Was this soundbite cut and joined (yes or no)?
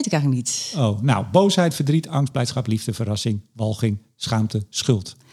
no